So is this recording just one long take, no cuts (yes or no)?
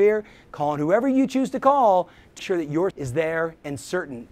no